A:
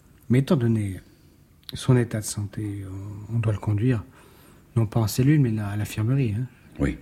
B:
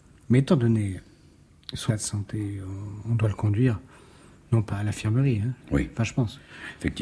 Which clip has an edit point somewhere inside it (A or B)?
B